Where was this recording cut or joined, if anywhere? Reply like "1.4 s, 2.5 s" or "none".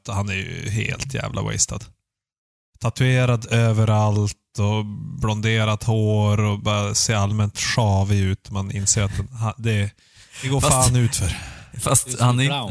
none